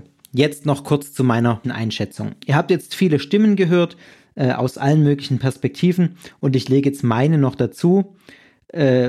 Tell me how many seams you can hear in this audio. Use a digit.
1